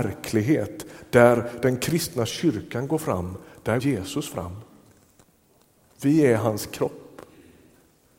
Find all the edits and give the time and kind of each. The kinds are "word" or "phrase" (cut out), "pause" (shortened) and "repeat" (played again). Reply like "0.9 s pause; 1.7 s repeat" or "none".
3.8 s word